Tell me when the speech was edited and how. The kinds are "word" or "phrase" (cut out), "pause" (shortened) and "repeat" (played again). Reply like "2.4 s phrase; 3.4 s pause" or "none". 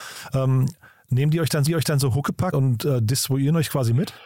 1.7 s repeat; 2.5 s word

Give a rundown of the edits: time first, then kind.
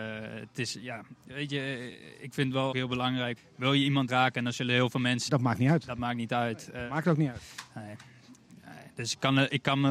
2.7 s word; 3.4 s phrase; 4.1 s word; 5.3 s phrase

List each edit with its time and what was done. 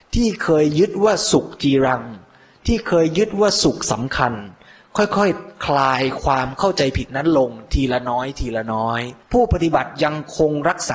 9.2 s pause

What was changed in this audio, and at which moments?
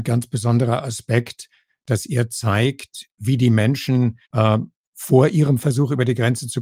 4.2 s pause

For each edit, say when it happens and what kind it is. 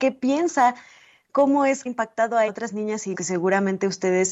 1.9 s phrase; 2.5 s phrase; 3.1 s word

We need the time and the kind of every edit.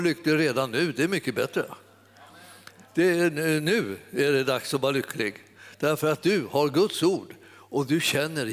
none

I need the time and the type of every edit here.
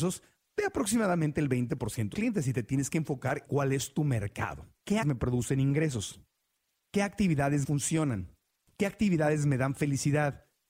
2.1 s word; 3.5 s word; 5.0 s word; 7.6 s word

